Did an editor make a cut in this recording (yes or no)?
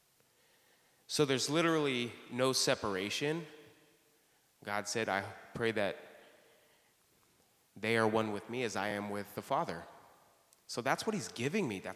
no